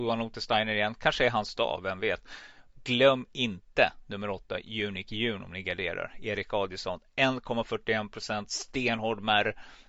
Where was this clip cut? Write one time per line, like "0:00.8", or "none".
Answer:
none